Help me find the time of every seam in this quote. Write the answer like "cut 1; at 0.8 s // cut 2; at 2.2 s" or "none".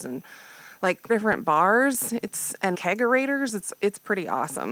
cut 1; at 1.1 s // cut 2; at 2.7 s